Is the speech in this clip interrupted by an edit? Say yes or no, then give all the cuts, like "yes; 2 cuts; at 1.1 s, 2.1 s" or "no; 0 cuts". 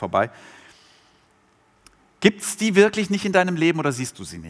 no; 0 cuts